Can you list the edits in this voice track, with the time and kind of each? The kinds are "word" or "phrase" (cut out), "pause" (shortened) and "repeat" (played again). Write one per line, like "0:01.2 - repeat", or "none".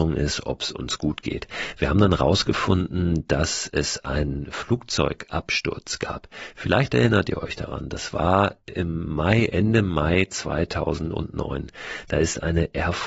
none